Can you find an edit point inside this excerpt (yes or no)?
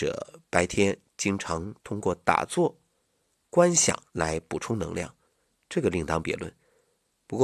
yes